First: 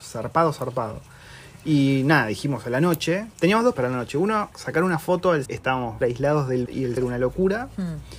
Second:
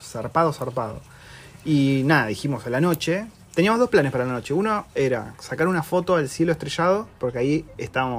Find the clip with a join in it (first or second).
first